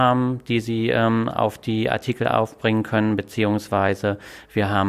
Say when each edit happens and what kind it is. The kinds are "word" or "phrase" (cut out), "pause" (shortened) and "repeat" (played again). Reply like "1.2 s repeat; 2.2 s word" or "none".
none